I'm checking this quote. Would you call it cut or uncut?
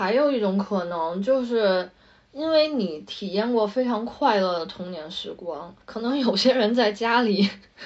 cut